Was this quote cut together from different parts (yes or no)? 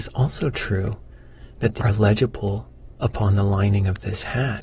yes